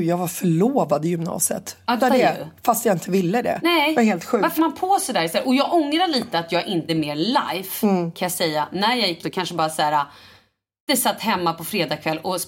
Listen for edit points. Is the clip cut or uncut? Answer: cut